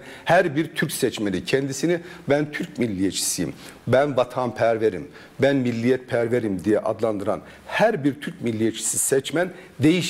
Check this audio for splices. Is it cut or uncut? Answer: uncut